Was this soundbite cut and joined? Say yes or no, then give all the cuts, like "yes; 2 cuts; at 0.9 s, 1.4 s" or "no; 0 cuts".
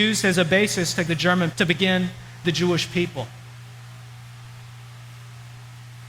yes; 3 cuts; at 1.1 s, 1.5 s, 2.4 s